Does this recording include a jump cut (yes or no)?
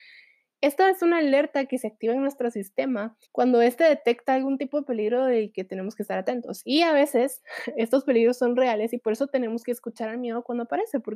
yes